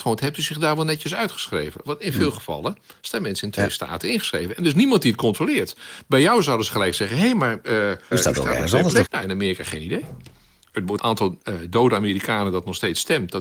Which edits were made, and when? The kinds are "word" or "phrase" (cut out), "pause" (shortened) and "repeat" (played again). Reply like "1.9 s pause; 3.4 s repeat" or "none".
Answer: 8.1 s word; 9.0 s word; 11.0 s word